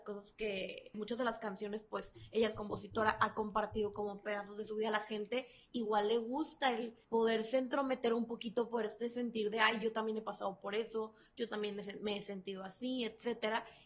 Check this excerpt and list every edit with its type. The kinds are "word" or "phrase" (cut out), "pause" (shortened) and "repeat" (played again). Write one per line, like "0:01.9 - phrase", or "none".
0:00.9 - word
0:07.0 - pause